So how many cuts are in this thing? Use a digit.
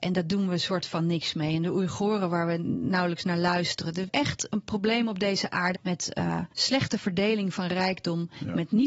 3